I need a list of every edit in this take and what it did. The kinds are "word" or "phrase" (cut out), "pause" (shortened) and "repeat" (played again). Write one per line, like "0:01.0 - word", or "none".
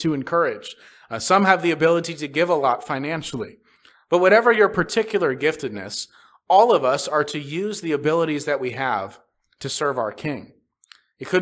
none